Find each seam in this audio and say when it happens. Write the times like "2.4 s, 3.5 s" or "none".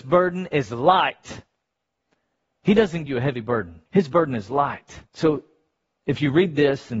3.1 s, 3.9 s, 5.1 s